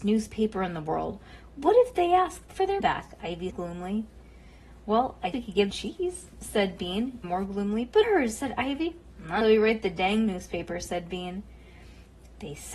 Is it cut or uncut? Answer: cut